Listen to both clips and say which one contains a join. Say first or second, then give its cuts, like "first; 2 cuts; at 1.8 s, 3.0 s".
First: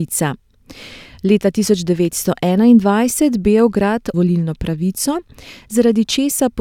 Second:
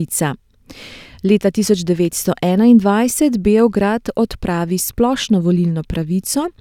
first; 1 cut; at 4.1 s